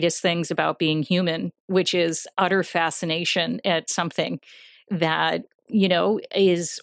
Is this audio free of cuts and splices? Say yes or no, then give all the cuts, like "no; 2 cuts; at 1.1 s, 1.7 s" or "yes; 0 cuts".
yes; 0 cuts